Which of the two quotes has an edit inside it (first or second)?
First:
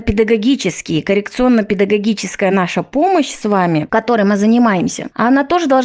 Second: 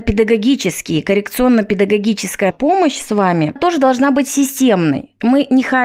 second